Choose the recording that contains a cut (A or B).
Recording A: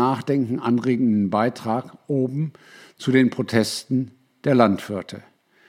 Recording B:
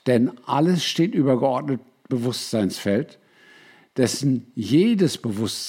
B